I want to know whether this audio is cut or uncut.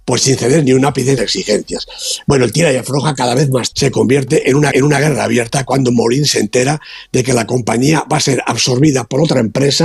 cut